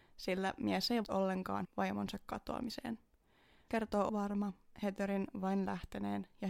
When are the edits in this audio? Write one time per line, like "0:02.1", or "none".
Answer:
0:01.0
0:01.6
0:03.7
0:04.1